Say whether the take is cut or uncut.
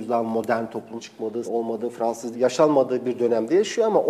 cut